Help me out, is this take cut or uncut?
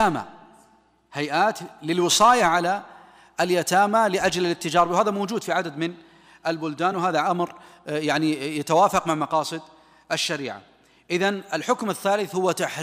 uncut